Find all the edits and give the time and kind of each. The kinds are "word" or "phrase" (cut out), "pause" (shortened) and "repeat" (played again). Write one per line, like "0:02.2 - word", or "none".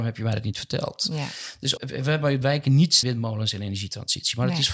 0:01.8 - word
0:02.4 - word
0:03.0 - word

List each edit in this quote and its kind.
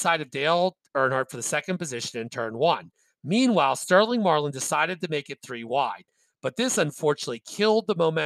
none

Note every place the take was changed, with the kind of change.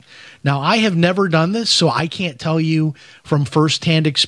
none

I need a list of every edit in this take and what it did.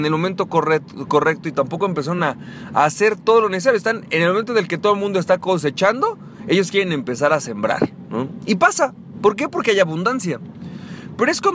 none

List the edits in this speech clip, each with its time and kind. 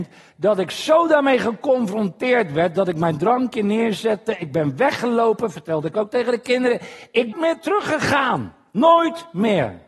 0:07.3 - phrase

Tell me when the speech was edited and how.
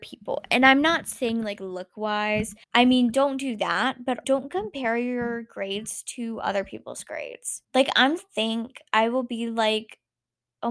0:02.6 - pause
0:04.2 - word
0:07.6 - pause
0:08.2 - phrase

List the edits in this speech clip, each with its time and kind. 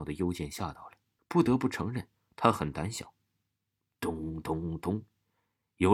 0:01.2 - pause

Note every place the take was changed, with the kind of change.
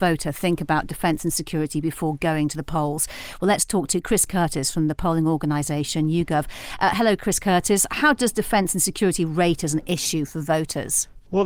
none

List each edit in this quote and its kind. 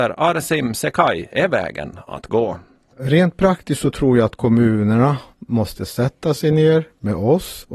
none

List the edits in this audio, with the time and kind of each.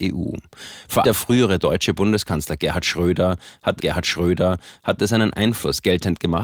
0:01.0 - word
0:03.8 - repeat

